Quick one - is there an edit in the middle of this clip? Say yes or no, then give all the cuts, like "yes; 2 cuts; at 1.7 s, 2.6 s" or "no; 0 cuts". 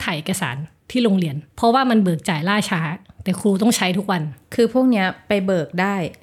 yes; 1 cut; at 1.5 s